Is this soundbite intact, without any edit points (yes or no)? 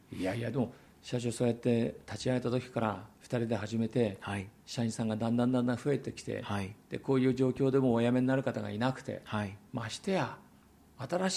no